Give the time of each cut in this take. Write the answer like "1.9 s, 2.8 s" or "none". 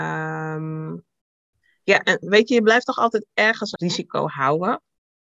2.2 s, 3.8 s